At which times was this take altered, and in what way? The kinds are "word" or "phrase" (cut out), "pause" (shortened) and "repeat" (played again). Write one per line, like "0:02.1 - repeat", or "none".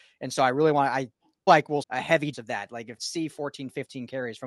0:01.5 - word
0:01.8 - word
0:02.3 - word
0:03.0 - phrase